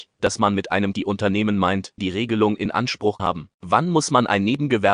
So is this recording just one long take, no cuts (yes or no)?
no